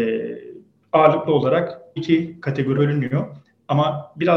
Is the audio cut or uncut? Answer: cut